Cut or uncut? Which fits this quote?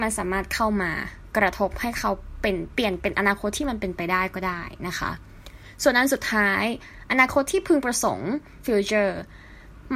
cut